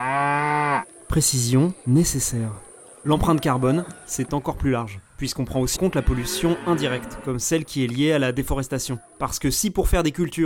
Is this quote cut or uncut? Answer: cut